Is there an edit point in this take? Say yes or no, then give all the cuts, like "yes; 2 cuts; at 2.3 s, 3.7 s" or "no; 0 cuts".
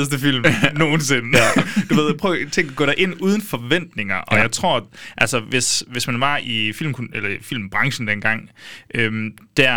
no; 0 cuts